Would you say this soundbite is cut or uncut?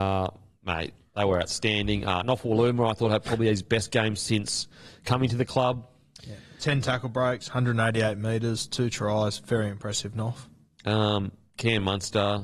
uncut